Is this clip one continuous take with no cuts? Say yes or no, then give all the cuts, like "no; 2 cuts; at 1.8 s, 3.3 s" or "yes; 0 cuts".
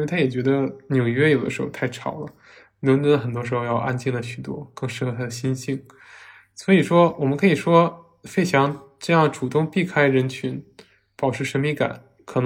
yes; 0 cuts